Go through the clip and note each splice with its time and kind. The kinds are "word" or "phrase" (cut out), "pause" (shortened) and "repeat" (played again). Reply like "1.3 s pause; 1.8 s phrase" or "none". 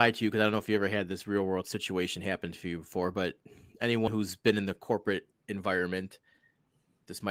none